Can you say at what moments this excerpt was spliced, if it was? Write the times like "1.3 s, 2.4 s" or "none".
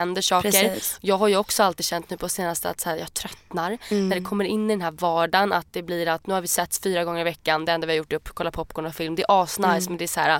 none